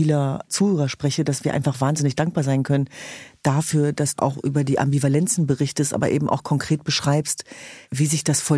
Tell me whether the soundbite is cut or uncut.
cut